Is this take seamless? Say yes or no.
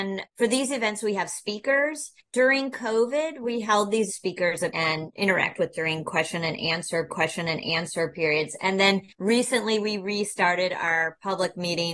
no